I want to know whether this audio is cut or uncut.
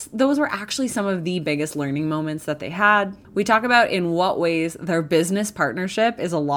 cut